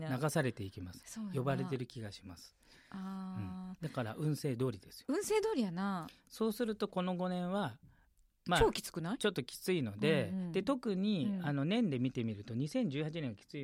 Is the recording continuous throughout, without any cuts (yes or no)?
yes